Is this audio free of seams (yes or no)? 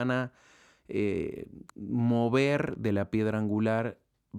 no